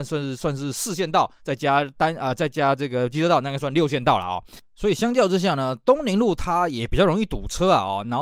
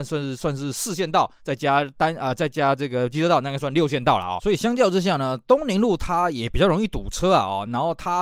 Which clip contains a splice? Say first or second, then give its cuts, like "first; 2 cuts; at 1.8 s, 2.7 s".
second; 1 cut; at 4.4 s